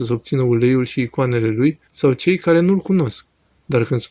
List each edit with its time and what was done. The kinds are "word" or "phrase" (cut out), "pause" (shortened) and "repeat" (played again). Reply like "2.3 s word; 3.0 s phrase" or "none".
1.9 s pause